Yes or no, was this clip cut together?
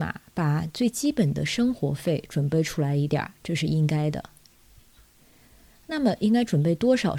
no